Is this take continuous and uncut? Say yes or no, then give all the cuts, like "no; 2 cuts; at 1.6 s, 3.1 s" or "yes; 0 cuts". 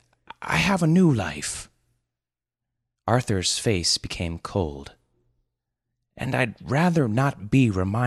yes; 0 cuts